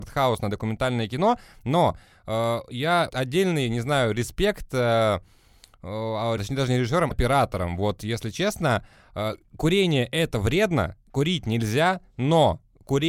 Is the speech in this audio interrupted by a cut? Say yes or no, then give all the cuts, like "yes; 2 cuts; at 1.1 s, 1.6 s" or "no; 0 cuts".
yes; 3 cuts; at 3.1 s, 6.4 s, 7.1 s